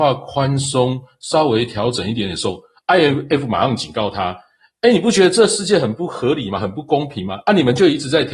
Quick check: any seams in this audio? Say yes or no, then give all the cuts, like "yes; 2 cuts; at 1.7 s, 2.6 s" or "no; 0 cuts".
no; 0 cuts